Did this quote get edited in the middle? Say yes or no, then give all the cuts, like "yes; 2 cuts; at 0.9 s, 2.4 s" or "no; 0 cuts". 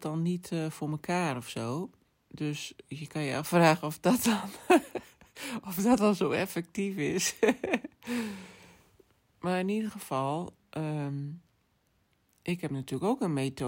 yes; 2 cuts; at 2.1 s, 12.0 s